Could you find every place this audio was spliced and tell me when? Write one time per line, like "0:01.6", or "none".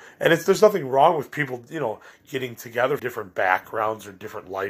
0:03.0